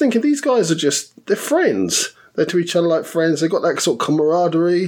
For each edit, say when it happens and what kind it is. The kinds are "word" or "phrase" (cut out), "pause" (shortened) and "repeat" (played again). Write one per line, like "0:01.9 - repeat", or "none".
0:02.5 - word